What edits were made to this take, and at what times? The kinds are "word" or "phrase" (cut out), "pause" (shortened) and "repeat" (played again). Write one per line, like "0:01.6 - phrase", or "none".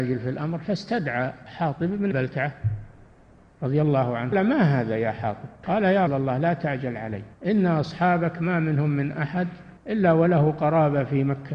0:02.1 - word
0:04.3 - word
0:05.6 - pause
0:06.1 - word
0:07.3 - pause
0:09.8 - pause